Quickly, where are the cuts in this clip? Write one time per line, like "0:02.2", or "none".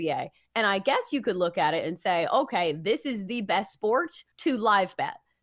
0:04.3